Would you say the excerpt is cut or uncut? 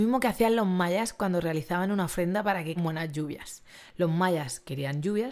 cut